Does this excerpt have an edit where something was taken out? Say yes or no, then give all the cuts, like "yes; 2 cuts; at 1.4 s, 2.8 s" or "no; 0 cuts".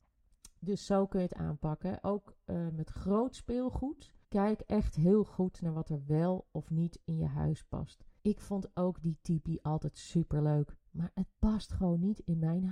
yes; 3 cuts; at 4.2 s, 8.2 s, 11.4 s